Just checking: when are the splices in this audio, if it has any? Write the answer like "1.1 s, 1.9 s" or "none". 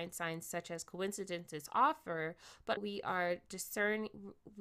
2.8 s